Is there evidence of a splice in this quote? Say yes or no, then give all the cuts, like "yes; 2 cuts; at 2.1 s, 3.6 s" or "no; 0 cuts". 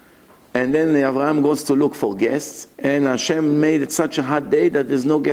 yes; 1 cut; at 2.7 s